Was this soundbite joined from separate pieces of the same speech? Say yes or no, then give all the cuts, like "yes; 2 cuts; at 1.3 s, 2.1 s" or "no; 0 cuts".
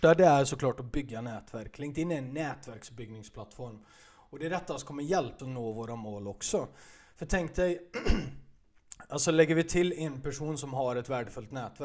yes; 1 cut; at 5.4 s